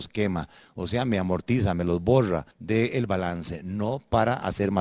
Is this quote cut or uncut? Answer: cut